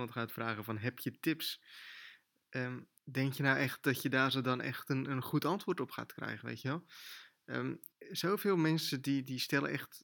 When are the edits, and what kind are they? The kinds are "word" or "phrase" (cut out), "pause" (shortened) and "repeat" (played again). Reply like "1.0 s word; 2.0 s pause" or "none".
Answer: 3.0 s pause; 7.9 s pause